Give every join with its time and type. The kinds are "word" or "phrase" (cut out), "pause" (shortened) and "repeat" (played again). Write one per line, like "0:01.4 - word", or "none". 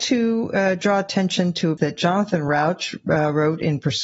0:01.8 - word